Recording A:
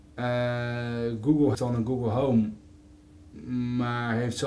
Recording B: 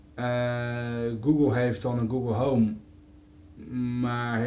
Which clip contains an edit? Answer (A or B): A